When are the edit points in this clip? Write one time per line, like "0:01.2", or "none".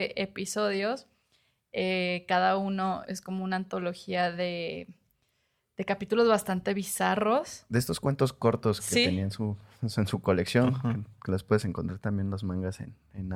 0:03.0